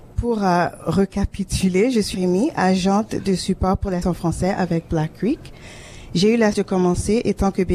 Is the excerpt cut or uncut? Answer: cut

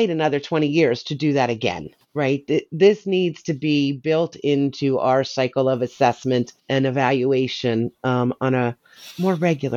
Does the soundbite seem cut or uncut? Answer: cut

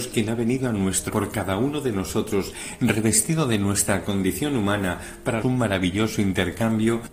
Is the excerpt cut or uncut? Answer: cut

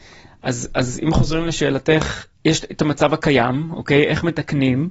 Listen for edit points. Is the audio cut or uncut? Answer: cut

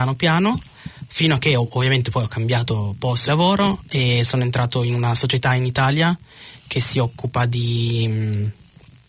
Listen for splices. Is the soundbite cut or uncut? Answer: cut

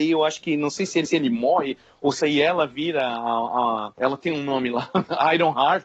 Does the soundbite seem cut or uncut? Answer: cut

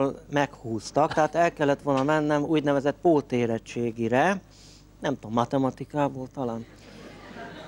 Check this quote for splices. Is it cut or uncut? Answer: uncut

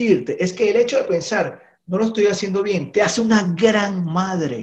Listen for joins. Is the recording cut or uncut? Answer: uncut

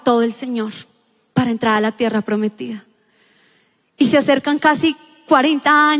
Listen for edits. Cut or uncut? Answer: uncut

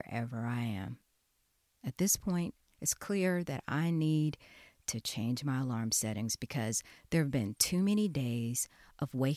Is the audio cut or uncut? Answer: uncut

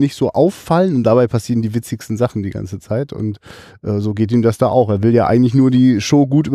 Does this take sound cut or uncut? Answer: uncut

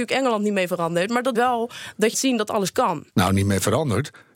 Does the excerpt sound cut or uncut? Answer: cut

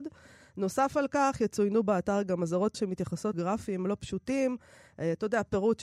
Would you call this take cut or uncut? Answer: cut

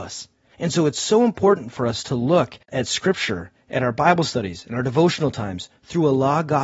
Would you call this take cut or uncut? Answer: cut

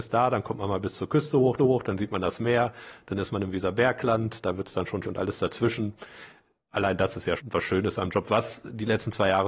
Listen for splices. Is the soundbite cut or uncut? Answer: cut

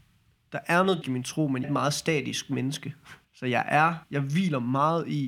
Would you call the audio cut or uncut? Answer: cut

